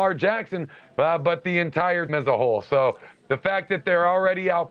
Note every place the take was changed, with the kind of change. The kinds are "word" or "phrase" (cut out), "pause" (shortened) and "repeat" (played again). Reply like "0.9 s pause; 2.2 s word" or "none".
2.1 s word